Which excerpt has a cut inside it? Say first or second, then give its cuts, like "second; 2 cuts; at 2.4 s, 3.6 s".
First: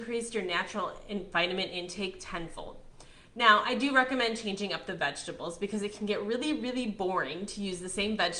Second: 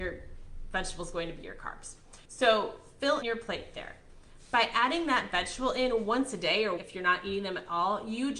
second; 3 cuts; at 2.2 s, 3.2 s, 6.8 s